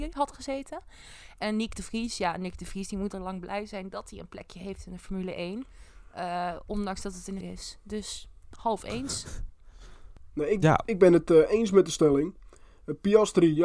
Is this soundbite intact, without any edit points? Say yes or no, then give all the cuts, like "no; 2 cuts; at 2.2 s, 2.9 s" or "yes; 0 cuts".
no; 1 cut; at 7.4 s